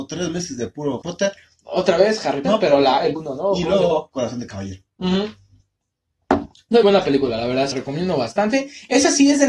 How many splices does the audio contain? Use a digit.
5